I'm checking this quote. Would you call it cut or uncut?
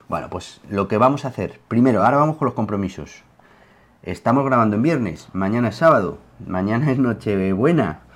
uncut